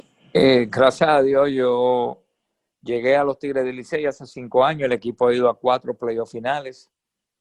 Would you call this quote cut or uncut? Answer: uncut